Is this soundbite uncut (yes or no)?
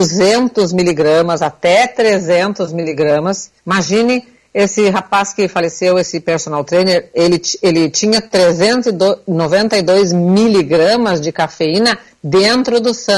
no